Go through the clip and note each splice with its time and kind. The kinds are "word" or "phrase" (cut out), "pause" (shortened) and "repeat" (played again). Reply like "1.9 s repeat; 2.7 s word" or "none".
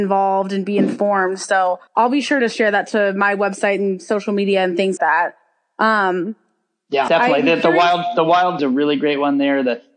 1.9 s pause; 5.0 s word; 7.1 s word; 8.6 s phrase